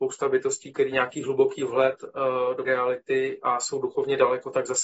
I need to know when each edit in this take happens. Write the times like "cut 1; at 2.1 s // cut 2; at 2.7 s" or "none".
cut 1; at 0.9 s // cut 2; at 2.7 s